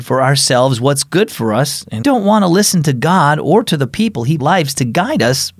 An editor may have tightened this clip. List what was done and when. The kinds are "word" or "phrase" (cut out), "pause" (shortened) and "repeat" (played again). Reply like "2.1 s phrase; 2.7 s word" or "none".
2.0 s word; 4.4 s phrase